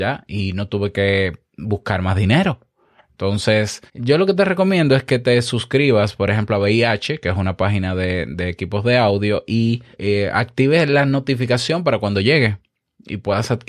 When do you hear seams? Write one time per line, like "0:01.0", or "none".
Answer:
0:01.5
0:03.9
0:09.9